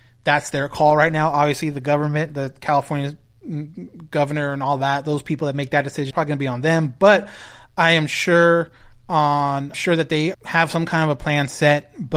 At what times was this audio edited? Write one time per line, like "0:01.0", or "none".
0:06.1
0:09.7
0:10.3